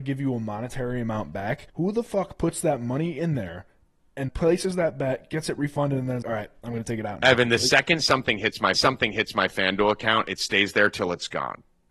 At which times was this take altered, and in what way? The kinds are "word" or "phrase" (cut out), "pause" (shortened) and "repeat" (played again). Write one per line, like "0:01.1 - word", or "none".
0:01.7 - pause
0:04.3 - word
0:06.2 - word
0:08.7 - repeat